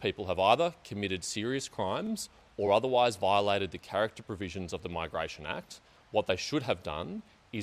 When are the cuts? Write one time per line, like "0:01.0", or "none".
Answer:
none